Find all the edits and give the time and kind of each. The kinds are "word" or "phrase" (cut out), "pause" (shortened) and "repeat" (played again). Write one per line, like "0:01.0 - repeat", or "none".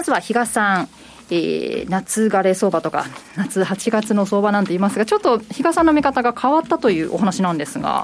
none